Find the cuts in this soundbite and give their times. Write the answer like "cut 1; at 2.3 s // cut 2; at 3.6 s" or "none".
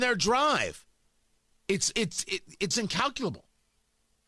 cut 1; at 1.9 s // cut 2; at 2.7 s